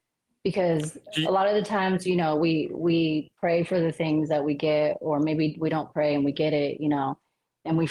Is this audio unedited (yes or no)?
yes